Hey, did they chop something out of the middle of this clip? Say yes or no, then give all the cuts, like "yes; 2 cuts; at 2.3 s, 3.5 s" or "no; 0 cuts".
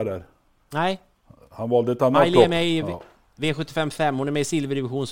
no; 0 cuts